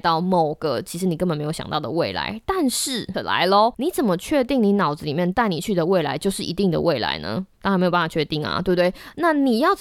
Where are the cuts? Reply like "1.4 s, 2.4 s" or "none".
3.1 s, 7.5 s